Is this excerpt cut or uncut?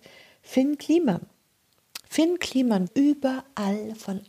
cut